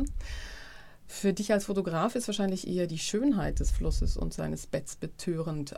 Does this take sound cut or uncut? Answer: uncut